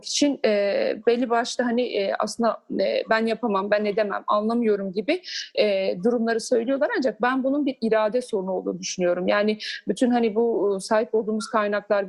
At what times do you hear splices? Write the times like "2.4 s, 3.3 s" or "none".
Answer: none